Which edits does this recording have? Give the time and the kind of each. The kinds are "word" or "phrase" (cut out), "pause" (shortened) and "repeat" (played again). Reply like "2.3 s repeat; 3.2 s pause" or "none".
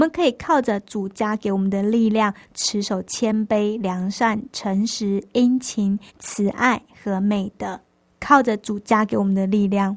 6.1 s pause; 8.1 s pause